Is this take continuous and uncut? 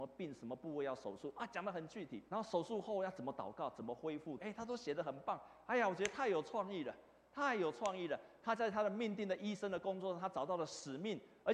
no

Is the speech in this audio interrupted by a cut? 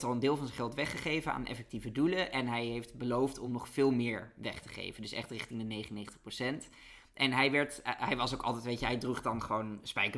no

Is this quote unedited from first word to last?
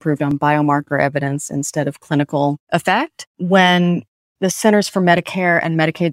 yes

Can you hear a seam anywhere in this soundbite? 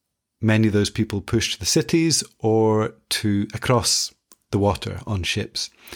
no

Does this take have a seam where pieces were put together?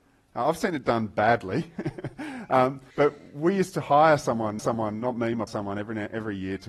yes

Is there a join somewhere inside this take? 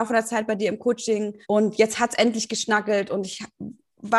yes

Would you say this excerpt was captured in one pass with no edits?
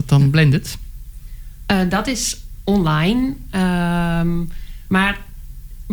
yes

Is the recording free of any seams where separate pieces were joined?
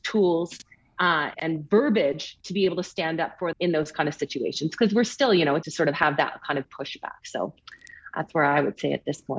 no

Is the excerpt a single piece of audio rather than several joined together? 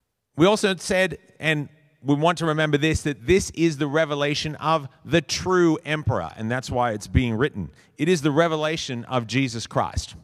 yes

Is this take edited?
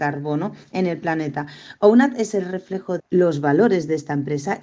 yes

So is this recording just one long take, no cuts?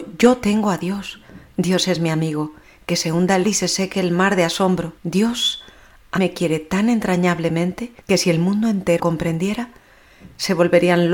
no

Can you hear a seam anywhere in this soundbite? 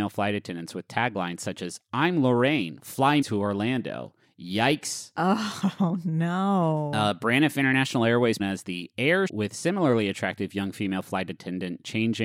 yes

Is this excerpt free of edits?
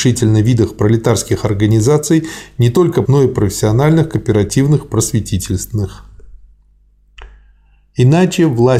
no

